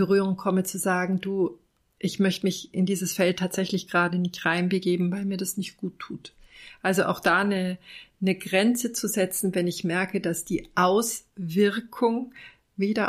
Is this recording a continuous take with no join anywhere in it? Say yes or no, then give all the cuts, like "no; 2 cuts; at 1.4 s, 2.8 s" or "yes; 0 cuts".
yes; 0 cuts